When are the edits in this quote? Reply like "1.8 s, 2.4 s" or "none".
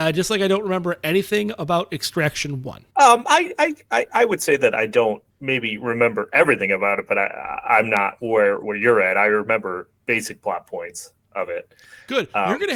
2.9 s, 5.3 s, 10.0 s